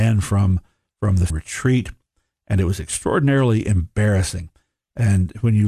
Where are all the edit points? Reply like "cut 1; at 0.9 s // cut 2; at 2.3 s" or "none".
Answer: cut 1; at 1.3 s